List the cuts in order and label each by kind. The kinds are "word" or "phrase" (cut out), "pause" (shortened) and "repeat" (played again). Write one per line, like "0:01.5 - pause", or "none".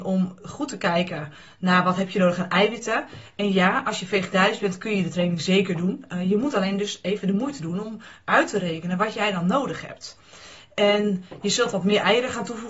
none